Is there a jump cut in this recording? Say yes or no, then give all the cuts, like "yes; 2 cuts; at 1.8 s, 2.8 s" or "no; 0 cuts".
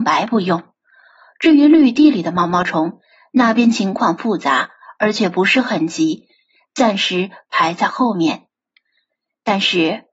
no; 0 cuts